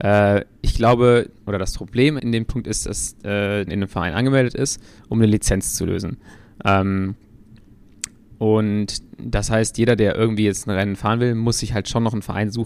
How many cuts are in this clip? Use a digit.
3